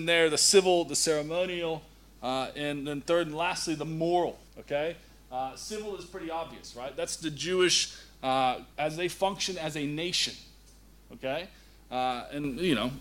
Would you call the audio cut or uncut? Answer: cut